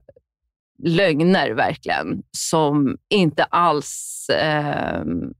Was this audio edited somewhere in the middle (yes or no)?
yes